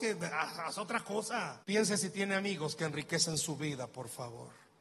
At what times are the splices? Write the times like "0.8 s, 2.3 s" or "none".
1.6 s